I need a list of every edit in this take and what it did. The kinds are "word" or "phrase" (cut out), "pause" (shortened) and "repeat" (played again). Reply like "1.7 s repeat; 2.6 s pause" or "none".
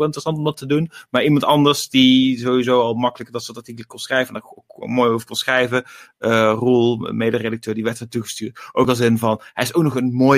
none